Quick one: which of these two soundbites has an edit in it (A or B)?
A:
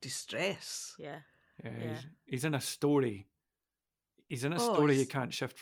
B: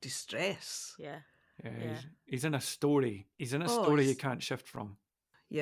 B